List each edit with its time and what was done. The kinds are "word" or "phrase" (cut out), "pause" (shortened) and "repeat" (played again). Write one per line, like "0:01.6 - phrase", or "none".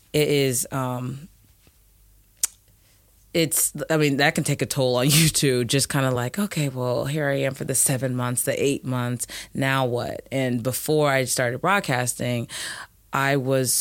none

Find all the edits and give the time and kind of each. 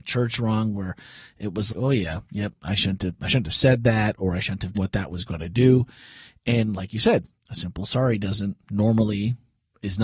0:01.7 - word
0:02.2 - pause
0:04.7 - phrase
0:08.6 - pause

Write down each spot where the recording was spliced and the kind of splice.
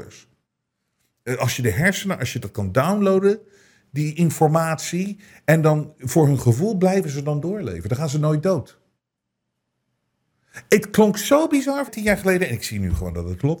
0:11.9 - word

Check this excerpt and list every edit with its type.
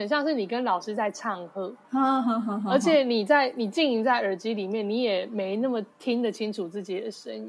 0:01.8 - pause
0:05.9 - pause

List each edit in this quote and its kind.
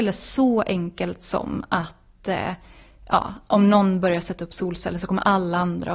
none

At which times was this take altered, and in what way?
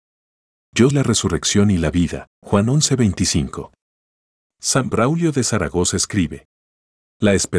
0:00.9 - word
0:02.3 - pause

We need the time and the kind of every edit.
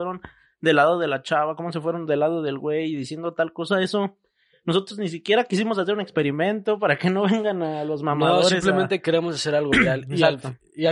none

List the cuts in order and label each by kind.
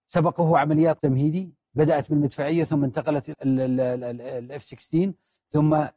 0:01.0 - word
0:03.3 - word

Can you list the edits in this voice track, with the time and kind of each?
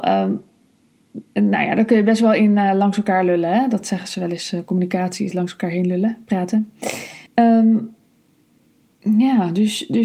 0:07.3 - pause

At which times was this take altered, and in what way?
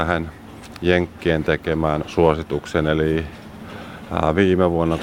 0:02.0 - word

